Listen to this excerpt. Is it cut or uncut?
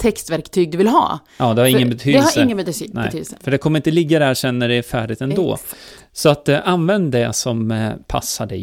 uncut